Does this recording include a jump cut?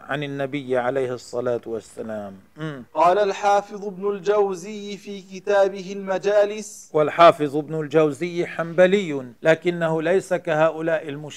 yes; 2 cuts; at 2.9 s, 9.4 s

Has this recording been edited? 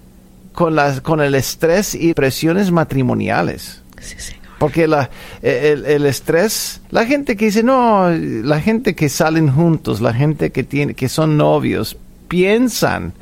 yes; 2 cuts; at 2.1 s, 6.8 s

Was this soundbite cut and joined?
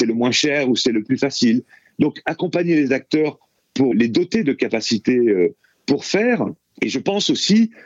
yes; 1 cut; at 3.9 s

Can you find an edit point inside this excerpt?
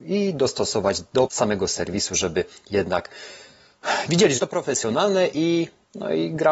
yes; 2 cuts; at 1.3 s, 4.4 s

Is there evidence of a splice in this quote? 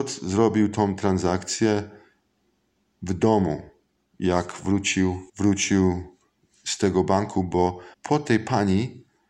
yes; 2 cuts; at 5.3 s, 7.9 s

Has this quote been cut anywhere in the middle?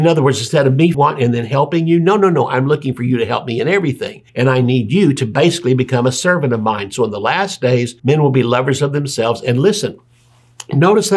yes; 3 cuts; at 0.9 s, 4.3 s, 8.0 s

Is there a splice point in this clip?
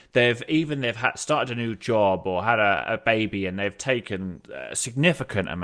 no; 0 cuts

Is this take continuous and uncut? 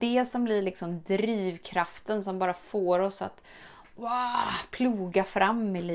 yes; 0 cuts

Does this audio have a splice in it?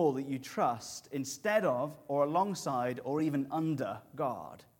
no; 0 cuts

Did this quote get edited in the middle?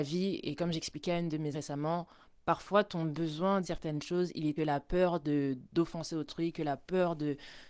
yes; 3 cuts; at 1.5 s, 3.6 s, 4.6 s

